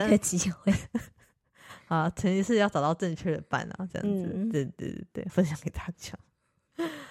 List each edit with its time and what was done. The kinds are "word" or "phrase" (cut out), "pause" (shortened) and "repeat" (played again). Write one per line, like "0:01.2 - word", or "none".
0:05.3 - word